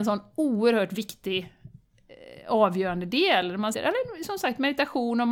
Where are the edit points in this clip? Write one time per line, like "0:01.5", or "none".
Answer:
0:03.7